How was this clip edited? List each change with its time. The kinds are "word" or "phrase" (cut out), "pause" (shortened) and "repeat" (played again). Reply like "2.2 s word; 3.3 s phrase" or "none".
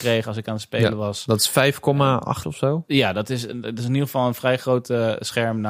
2.4 s word